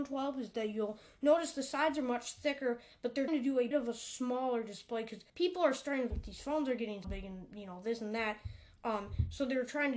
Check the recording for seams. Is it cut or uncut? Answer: cut